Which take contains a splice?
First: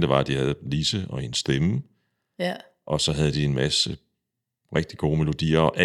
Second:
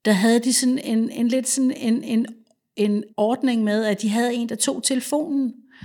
second; 1 cut; at 3.1 s

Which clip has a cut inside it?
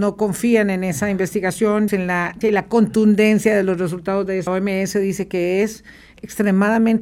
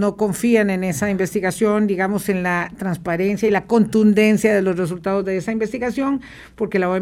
first; 3 cuts; at 1.9 s, 2.4 s, 4.5 s

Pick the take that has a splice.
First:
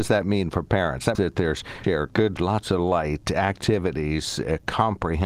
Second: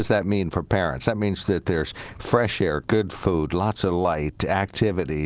first; 3 cuts; at 1.1 s, 1.8 s, 2.4 s

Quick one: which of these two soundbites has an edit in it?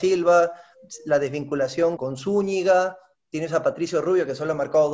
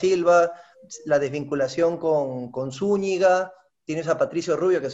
first; 1 cut; at 2.0 s

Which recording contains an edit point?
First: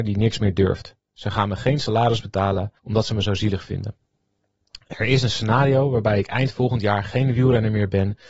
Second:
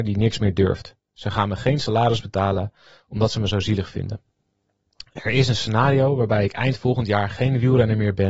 first; 1 cut; at 2.8 s

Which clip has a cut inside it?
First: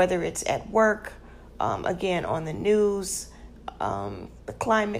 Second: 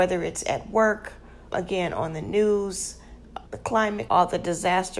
second; 3 cuts; at 1.5 s, 3.5 s, 4.1 s

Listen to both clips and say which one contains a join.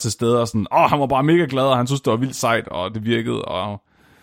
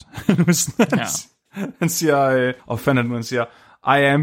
second; 1 cut; at 2.6 s

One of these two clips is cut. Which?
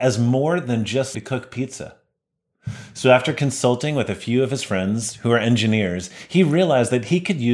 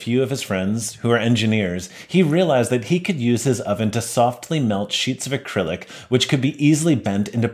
first; 1 cut; at 1.1 s

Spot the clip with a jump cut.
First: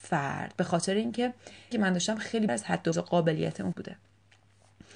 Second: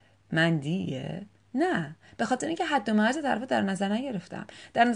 first; 4 cuts; at 1.7 s, 2.5 s, 2.9 s, 3.7 s

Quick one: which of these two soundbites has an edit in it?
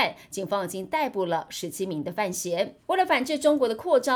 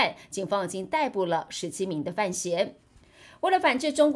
first; 1 cut; at 2.8 s

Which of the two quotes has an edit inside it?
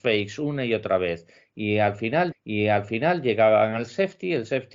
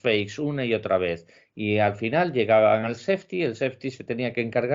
first; 1 cut; at 2.3 s

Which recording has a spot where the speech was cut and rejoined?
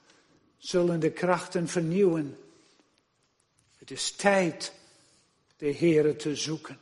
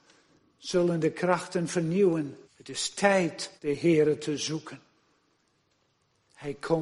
second; 2 cuts; at 2.4 s, 3.6 s

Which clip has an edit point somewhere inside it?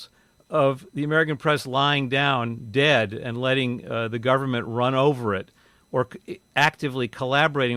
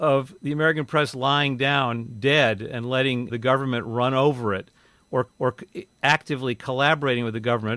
second; 2 cuts; at 3.3 s, 5.3 s

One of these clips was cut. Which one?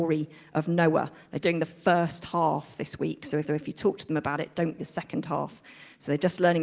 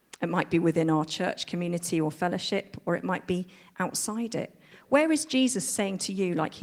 first; 3 cuts; at 1.4 s, 3.5 s, 4.8 s

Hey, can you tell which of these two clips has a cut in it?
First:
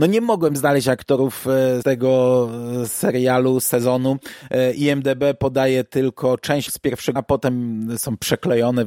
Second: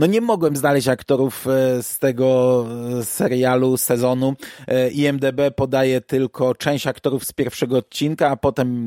first; 3 cuts; at 1.8 s, 6.7 s, 7.2 s

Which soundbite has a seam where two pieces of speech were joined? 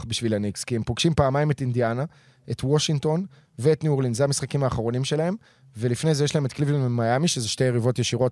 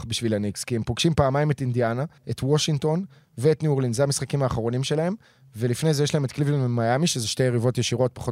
second; 1 cut; at 2.2 s

